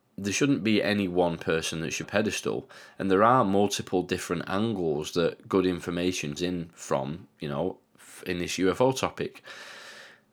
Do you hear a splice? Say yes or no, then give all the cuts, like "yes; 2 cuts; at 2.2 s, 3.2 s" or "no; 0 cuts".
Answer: yes; 3 cuts; at 2.0 s, 6.4 s, 7.3 s